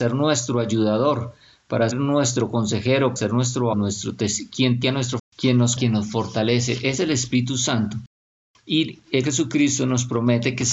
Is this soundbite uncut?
no; 8 cuts; at 1.9 s, 3.2 s, 3.7 s, 4.8 s, 5.2 s, 5.8 s, 7.0 s, 9.2 s

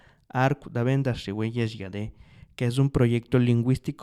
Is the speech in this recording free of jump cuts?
yes; 0 cuts

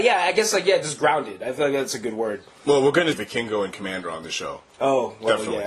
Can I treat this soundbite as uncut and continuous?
no; 1 cut; at 3.1 s

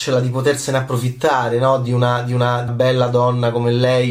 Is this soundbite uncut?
no; 1 cut; at 2.7 s

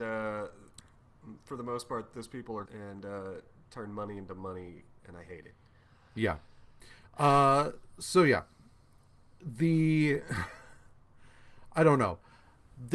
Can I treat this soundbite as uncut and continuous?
no; 1 cut; at 2.6 s

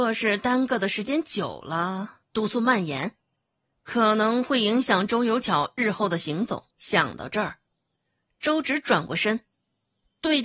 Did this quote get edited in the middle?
yes; 2 cuts; at 2.2 s, 6.7 s

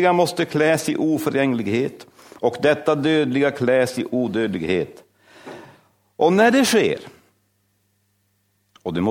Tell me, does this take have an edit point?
no; 0 cuts

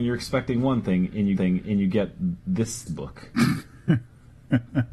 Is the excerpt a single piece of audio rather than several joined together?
no; 2 cuts; at 1.4 s, 2.9 s

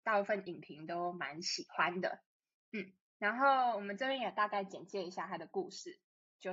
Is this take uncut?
yes; 0 cuts

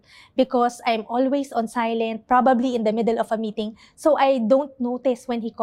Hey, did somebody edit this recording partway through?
no; 0 cuts

